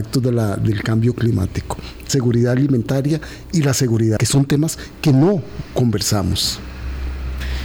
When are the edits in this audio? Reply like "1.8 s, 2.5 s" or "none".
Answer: 2.1 s, 4.2 s